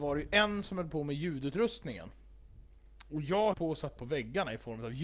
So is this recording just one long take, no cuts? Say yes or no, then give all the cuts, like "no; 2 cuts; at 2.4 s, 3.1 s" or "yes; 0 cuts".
no; 2 cuts; at 3.5 s, 4.0 s